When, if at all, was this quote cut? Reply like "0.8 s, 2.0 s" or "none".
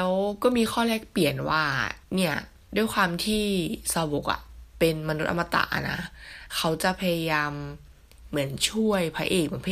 2.0 s